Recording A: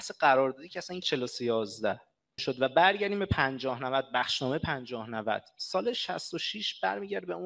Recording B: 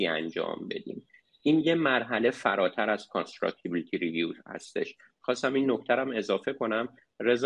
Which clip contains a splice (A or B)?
A